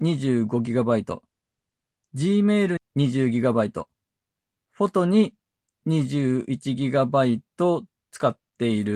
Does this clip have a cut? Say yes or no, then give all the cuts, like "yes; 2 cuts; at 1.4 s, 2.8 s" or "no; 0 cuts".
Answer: yes; 1 cut; at 2.8 s